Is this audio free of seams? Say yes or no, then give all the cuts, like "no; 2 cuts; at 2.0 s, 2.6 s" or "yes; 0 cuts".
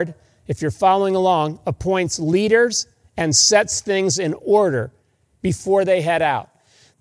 yes; 0 cuts